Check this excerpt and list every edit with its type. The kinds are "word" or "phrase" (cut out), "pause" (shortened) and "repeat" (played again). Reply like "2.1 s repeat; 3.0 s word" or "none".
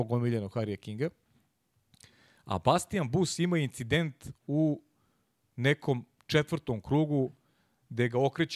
none

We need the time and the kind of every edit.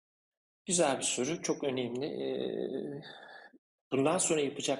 none

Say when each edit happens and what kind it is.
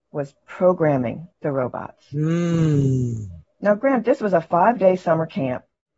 1.3 s pause

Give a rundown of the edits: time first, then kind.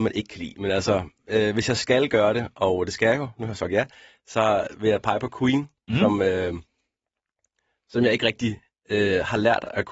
none

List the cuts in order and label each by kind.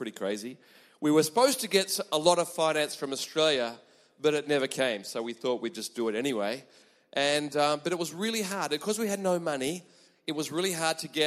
none

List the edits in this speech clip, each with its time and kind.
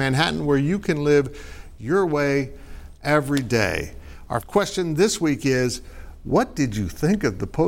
4.4 s word

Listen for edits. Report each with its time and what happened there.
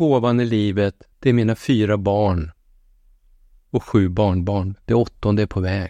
1.1 s pause

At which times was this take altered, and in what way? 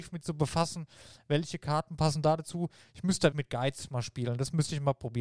3.3 s word

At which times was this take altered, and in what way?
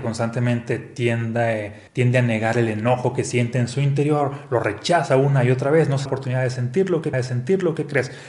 1.9 s pause; 6.1 s phrase; 7.1 s repeat

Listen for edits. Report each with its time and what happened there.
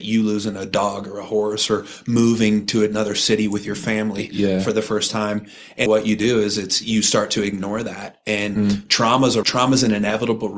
5.9 s word; 9.4 s word

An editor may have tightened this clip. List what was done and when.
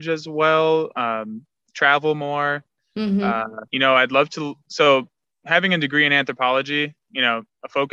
3.7 s pause

